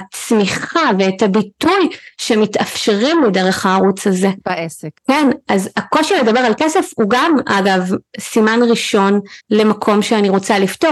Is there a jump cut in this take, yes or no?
yes